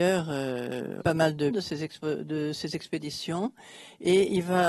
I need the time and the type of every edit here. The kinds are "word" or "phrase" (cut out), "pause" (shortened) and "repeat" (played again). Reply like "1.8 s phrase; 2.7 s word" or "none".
1.0 s word; 1.5 s word